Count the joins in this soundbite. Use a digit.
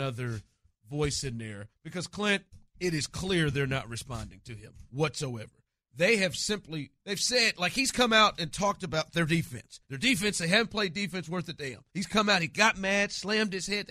5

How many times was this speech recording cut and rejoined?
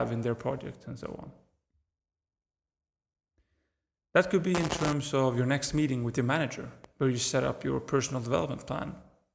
0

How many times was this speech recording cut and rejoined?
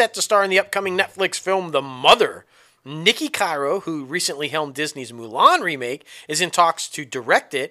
0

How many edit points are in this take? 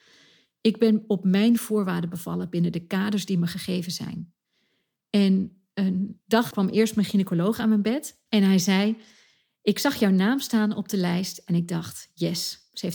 2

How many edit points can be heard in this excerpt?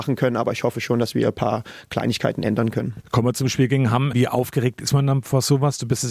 1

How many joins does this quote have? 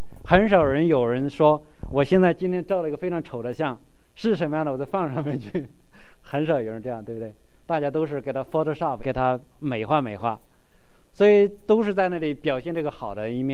1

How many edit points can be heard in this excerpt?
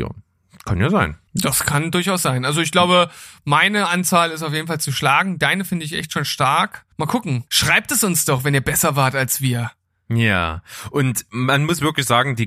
3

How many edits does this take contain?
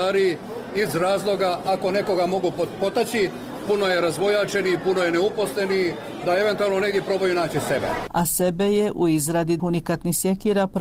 1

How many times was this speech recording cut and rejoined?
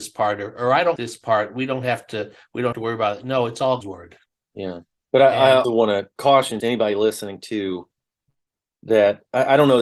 5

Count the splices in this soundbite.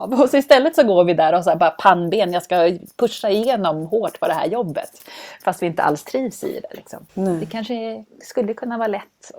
1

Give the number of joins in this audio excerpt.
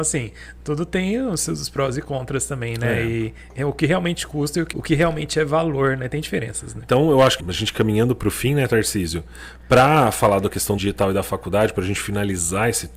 3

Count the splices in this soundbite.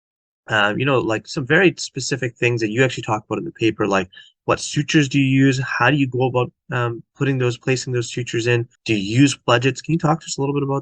1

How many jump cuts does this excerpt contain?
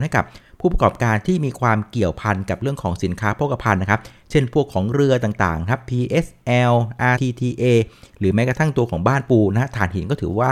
1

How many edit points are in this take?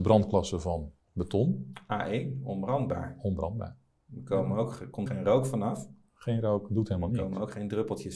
2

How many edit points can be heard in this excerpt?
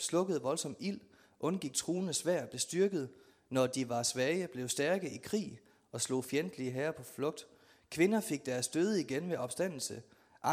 0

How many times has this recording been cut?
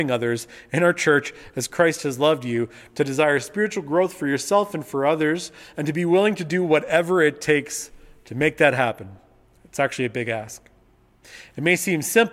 0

